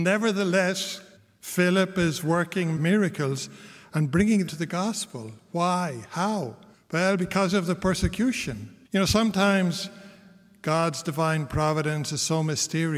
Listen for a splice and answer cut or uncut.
cut